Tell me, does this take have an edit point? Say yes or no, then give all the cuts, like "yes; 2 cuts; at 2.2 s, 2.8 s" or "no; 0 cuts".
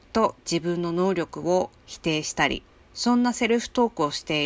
yes; 1 cut; at 2.7 s